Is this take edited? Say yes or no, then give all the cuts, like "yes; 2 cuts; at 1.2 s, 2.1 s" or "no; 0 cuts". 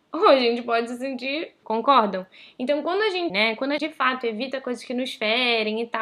yes; 3 cuts; at 1.6 s, 3.3 s, 3.8 s